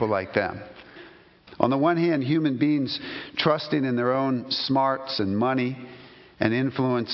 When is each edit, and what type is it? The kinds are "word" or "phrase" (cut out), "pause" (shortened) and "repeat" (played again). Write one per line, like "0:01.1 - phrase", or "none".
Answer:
none